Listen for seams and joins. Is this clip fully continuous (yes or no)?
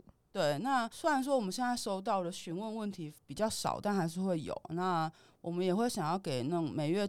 yes